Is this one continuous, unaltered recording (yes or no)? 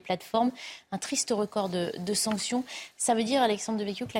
yes